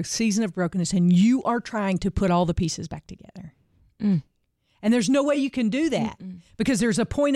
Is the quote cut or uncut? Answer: uncut